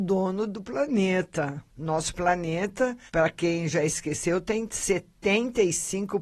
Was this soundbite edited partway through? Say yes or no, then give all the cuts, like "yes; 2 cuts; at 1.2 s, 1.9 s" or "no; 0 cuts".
yes; 2 cuts; at 1.7 s, 3.1 s